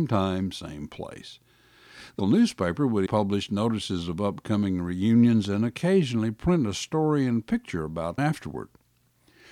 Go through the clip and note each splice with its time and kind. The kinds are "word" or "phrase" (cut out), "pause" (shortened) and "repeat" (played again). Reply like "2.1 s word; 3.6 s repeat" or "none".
2.2 s word; 3.1 s word; 8.2 s word